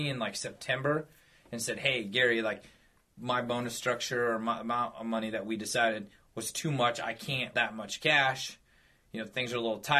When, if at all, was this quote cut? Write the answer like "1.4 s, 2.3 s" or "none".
3.2 s, 7.5 s

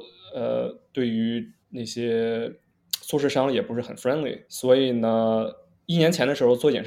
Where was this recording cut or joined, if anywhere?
1.6 s, 4.5 s

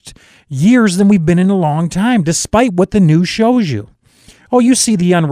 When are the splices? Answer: none

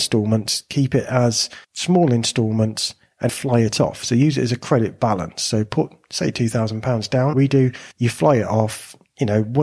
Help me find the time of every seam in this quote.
1.6 s, 3.3 s, 7.3 s, 7.9 s

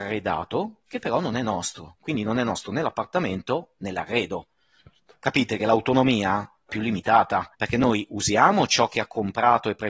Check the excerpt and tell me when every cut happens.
6.7 s, 7.5 s

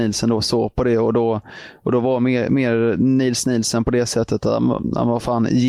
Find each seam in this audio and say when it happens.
none

